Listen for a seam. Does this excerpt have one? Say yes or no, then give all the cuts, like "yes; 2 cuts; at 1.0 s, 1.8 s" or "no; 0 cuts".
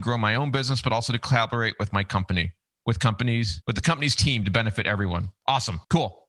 no; 0 cuts